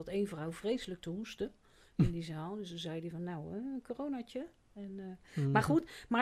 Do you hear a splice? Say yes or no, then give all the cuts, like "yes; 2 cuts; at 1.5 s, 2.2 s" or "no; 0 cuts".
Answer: no; 0 cuts